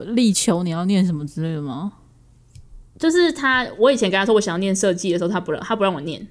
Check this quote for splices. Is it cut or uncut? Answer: cut